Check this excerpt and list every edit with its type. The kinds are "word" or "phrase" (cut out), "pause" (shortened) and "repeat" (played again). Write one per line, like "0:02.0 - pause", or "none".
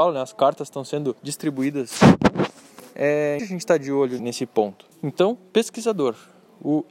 0:01.2 - pause
0:03.4 - word
0:04.2 - word
0:04.9 - pause